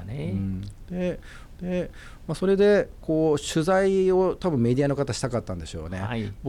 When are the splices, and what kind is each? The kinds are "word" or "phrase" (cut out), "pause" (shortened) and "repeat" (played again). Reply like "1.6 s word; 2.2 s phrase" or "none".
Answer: 1.6 s repeat